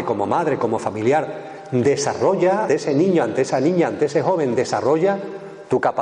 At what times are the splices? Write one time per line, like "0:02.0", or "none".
0:02.7